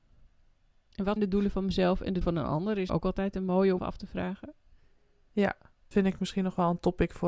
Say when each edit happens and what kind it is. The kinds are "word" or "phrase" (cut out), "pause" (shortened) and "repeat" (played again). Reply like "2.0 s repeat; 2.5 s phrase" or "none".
1.2 s word; 2.2 s word; 2.9 s word; 3.8 s word; 5.9 s word